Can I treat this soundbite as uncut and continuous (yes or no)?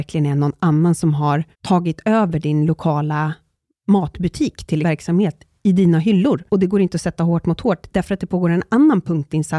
no